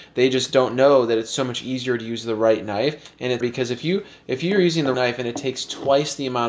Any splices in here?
yes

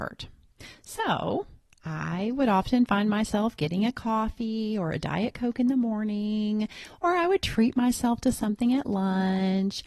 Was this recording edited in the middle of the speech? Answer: no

